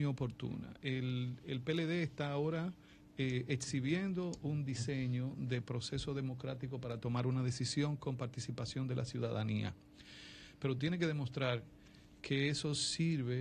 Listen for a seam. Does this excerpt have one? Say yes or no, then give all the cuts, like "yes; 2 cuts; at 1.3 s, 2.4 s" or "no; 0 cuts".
no; 0 cuts